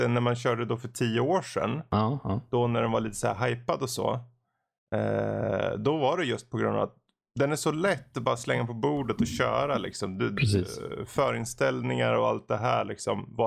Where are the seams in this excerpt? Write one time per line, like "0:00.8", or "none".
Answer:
none